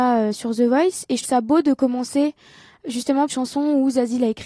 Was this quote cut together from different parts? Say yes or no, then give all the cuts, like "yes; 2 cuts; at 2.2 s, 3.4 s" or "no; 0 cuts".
yes; 2 cuts; at 1.2 s, 3.3 s